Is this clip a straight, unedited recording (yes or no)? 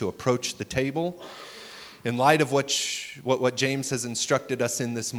yes